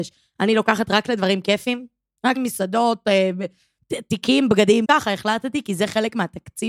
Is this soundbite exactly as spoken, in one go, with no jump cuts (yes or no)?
no